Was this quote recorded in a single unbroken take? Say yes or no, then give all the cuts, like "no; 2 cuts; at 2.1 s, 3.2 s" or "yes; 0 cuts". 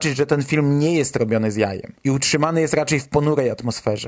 yes; 0 cuts